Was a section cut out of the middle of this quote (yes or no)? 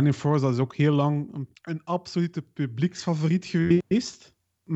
no